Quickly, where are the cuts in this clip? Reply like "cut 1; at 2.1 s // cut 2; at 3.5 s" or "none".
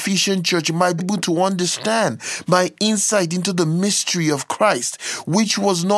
cut 1; at 1.0 s